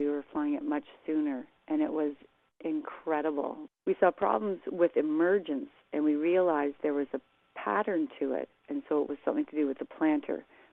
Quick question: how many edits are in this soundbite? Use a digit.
0